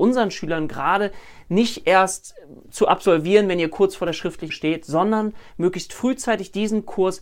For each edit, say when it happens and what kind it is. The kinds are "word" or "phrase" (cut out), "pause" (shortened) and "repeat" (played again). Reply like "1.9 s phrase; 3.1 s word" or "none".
4.5 s word